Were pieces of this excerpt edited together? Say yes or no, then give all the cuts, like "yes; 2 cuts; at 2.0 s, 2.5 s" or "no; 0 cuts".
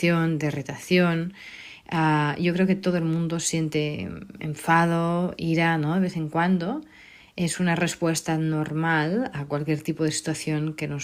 no; 0 cuts